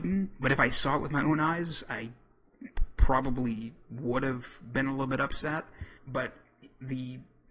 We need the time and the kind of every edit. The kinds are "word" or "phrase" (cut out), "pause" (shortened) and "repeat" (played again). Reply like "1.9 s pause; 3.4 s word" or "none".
6.0 s pause